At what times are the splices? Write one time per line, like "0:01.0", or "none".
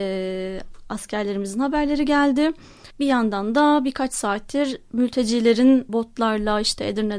0:02.9
0:05.9